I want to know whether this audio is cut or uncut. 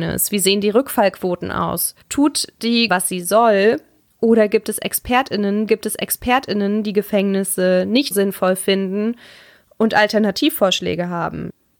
cut